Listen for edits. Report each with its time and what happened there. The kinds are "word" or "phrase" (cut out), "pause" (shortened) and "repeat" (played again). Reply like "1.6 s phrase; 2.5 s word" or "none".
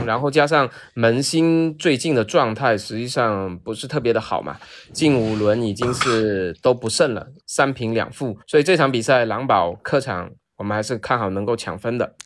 7.4 s pause; 8.4 s pause

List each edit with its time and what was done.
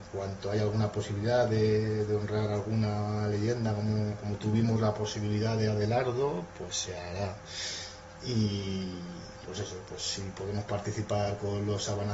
9.4 s word

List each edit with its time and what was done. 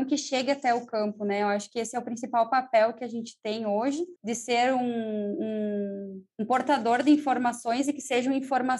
4.2 s pause; 6.3 s pause

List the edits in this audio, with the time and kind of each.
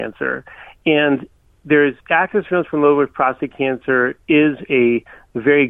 2.0 s pause; 4.2 s pause

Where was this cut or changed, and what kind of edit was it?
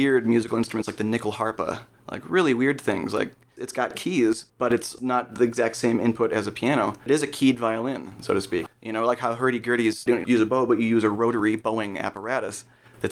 4.5 s pause

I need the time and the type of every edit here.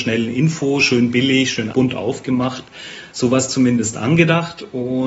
1.7 s word

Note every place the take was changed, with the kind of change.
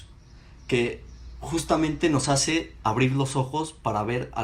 none

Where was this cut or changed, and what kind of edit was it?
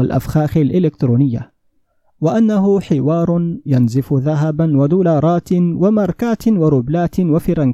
none

